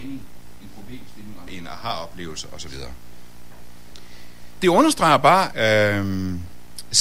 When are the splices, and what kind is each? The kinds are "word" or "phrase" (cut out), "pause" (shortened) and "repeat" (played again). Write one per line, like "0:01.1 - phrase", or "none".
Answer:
0:01.5 - phrase
0:04.6 - word
0:05.5 - word